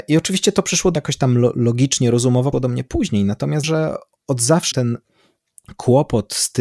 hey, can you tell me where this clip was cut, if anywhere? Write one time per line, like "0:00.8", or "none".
0:01.0
0:02.5
0:03.6
0:04.7